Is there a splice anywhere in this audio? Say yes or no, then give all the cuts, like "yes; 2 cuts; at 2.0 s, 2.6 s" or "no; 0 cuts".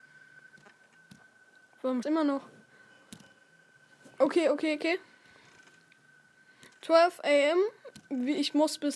yes; 1 cut; at 2.0 s